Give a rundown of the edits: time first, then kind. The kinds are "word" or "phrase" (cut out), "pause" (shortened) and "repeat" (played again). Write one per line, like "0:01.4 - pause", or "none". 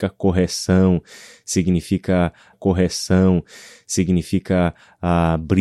0:02.5 - repeat